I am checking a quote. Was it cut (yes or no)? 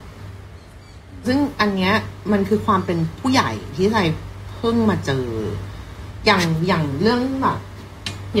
yes